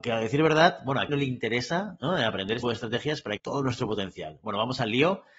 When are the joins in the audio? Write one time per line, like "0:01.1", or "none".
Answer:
0:01.1
0:02.6
0:03.4